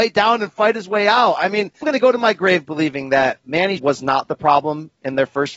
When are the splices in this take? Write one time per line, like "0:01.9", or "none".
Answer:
0:01.8
0:03.8